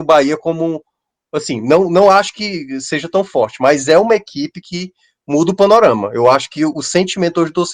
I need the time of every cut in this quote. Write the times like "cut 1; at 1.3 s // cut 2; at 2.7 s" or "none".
none